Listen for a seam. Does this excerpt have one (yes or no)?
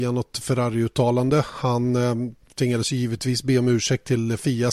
no